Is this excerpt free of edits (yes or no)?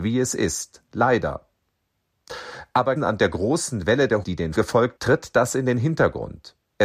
no